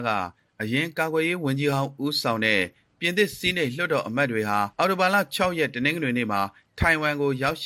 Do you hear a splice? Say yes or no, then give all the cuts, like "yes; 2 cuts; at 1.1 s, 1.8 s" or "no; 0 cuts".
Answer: yes; 1 cut; at 4.7 s